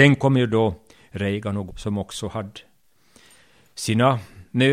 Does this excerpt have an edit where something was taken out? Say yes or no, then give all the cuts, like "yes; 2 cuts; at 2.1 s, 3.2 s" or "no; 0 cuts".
yes; 1 cut; at 1.7 s